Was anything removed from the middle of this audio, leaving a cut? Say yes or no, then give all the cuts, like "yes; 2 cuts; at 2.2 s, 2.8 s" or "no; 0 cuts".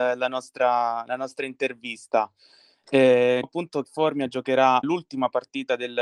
yes; 3 cuts; at 3.4 s, 3.8 s, 4.8 s